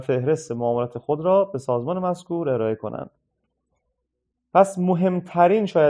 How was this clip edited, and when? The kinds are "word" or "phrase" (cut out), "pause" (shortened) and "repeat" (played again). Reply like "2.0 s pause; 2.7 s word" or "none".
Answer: none